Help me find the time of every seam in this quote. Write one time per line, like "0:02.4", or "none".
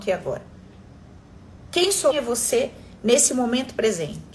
0:02.1